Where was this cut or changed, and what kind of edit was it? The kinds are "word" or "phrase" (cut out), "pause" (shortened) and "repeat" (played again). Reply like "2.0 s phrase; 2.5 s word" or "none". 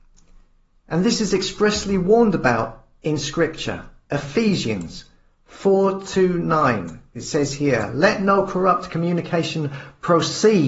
none